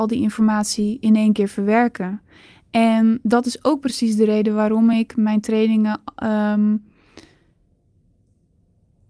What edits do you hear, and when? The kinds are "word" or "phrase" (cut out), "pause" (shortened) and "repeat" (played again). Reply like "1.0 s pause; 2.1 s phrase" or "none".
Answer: none